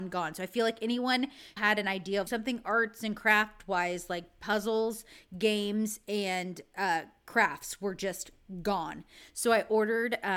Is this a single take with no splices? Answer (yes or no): no